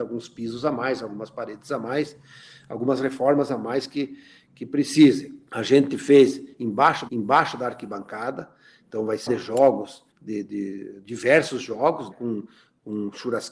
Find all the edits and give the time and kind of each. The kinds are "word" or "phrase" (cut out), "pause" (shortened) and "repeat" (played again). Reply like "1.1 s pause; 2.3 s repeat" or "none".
7.1 s repeat; 9.3 s phrase; 10.1 s pause; 12.1 s word

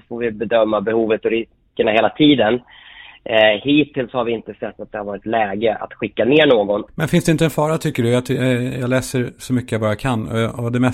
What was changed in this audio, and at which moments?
none

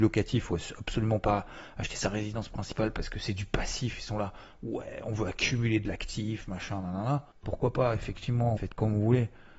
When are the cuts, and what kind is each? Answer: 7.3 s pause; 8.6 s word

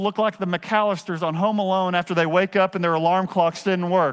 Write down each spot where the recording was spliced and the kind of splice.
none

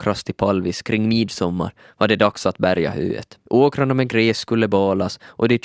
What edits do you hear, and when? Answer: 3.4 s pause

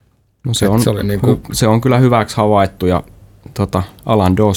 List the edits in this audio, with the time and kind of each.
none

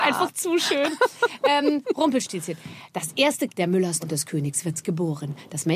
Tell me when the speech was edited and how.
3.5 s word; 4.0 s word

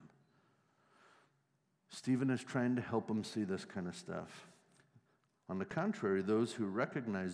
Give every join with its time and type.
none

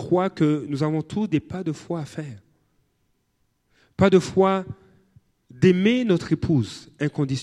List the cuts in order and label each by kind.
none

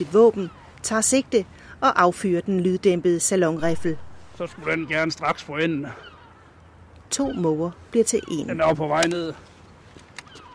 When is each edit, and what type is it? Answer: none

